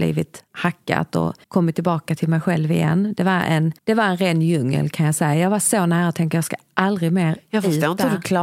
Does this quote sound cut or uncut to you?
cut